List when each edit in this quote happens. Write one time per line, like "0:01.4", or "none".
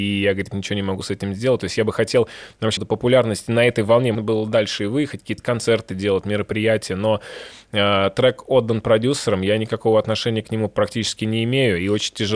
0:02.8
0:04.1